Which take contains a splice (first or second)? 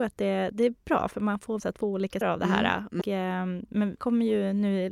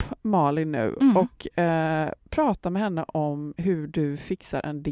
first